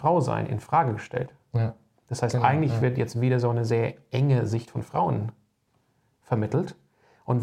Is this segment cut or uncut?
uncut